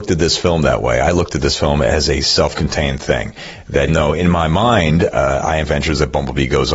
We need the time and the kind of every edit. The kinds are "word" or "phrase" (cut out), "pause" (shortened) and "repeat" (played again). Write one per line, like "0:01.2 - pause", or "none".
0:03.9 - word
0:05.6 - phrase